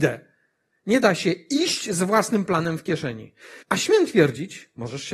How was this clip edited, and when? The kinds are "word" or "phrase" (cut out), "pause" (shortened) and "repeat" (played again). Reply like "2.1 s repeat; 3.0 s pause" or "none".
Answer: 3.6 s pause

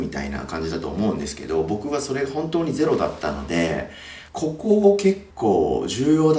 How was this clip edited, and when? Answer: 4.3 s phrase; 5.3 s pause

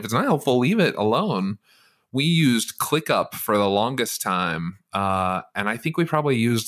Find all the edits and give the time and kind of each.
none

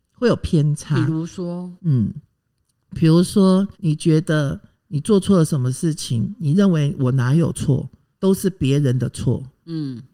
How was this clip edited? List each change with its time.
1.8 s pause; 3.7 s pause; 8.1 s pause

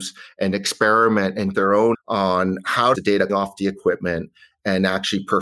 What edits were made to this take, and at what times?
1.5 s word; 1.9 s word; 2.9 s phrase; 3.3 s word

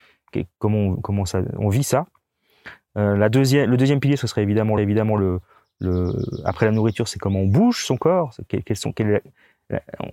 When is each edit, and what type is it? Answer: 4.8 s repeat

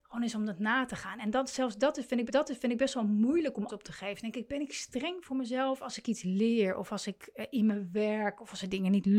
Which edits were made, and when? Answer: 2.3 s repeat; 3.7 s word

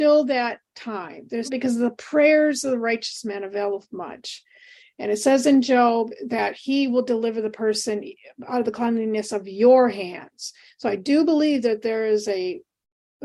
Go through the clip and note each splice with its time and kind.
1.5 s word

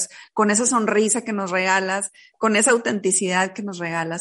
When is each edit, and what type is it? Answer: none

